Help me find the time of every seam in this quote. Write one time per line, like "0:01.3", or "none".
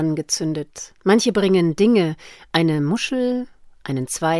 0:01.0